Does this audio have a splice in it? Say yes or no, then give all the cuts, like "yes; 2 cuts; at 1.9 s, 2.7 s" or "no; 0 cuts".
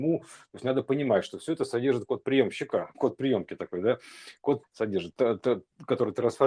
yes; 2 cuts; at 2.9 s, 4.6 s